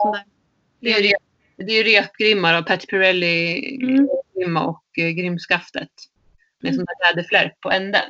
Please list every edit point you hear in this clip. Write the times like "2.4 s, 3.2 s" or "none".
none